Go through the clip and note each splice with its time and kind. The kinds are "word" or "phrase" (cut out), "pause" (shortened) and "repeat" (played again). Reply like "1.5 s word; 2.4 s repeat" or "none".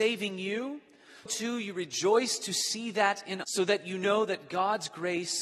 1.3 s word; 3.4 s word